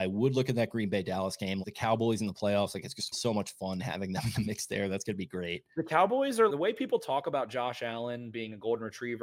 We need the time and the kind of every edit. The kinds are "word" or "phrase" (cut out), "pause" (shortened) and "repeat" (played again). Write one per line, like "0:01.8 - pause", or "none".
0:01.6 - word
0:03.1 - word
0:06.5 - word